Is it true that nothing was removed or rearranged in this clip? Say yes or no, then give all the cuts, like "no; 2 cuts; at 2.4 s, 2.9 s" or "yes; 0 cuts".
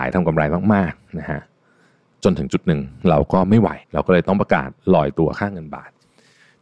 no; 1 cut; at 3.8 s